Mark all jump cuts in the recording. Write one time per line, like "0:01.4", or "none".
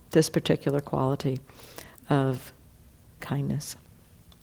0:03.2